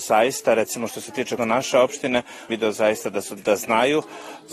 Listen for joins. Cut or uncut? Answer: cut